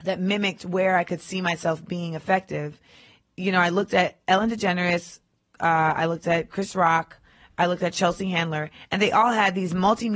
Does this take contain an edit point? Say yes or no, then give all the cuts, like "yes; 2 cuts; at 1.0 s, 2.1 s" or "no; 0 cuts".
no; 0 cuts